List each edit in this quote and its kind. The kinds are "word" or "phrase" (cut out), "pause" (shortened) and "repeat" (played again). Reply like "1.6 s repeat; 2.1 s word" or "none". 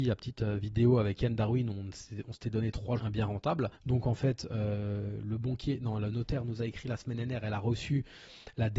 3.0 s phrase; 3.8 s pause